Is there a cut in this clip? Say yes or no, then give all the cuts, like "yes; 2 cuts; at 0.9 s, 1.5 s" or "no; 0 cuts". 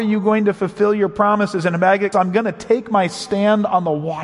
yes; 1 cut; at 2.1 s